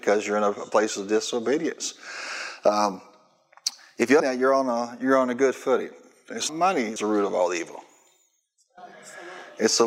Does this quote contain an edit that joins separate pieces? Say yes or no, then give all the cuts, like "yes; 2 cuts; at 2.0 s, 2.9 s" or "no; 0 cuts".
yes; 3 cuts; at 4.2 s, 6.5 s, 7.0 s